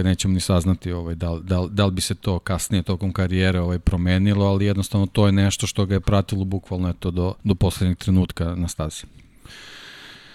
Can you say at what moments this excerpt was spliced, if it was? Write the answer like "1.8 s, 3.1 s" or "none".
7.4 s